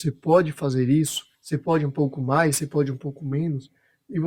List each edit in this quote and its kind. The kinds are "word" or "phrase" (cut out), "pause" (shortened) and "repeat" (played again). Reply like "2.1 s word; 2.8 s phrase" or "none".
1.3 s pause